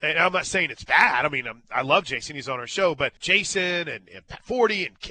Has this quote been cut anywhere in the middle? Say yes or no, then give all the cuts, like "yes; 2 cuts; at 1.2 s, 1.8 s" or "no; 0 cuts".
yes; 1 cut; at 3.2 s